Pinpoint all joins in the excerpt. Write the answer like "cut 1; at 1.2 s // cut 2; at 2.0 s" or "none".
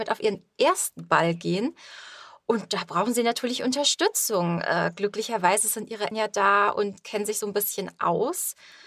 cut 1; at 6.1 s